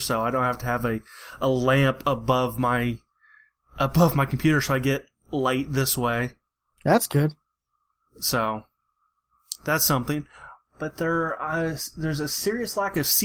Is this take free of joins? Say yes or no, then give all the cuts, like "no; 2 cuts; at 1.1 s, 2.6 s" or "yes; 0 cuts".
yes; 0 cuts